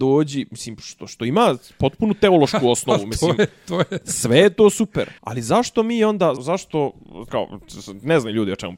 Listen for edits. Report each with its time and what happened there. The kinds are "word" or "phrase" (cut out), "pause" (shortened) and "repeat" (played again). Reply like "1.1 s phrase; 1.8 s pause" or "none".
5.2 s pause; 6.4 s word; 7.3 s word